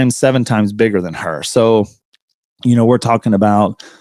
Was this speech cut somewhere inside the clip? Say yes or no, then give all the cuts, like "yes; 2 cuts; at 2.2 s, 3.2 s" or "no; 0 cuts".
no; 0 cuts